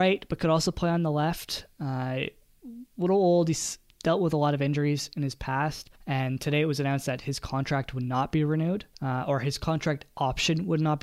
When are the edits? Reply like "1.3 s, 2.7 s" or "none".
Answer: 6.0 s, 8.9 s